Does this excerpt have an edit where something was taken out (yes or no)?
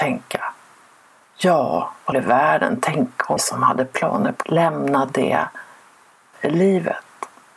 yes